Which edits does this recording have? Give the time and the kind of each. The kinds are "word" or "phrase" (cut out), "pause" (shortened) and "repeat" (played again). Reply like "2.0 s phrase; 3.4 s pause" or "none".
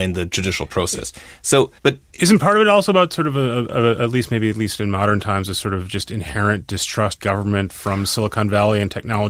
1.8 s pause; 7.2 s word